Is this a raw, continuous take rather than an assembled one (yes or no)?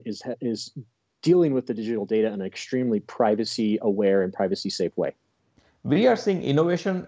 yes